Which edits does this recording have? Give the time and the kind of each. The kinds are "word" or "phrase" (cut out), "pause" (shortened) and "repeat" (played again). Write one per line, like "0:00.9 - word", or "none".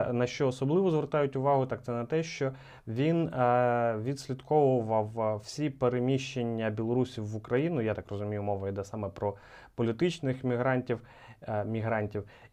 none